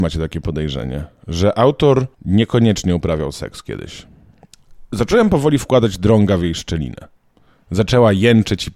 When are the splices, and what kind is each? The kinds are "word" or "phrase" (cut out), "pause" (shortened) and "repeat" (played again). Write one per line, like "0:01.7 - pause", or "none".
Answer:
0:02.1 - pause